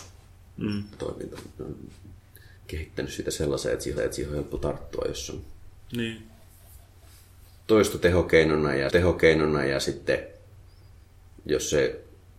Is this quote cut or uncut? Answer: cut